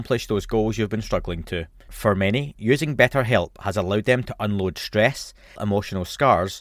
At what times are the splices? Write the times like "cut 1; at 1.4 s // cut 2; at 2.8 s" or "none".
cut 1; at 5.6 s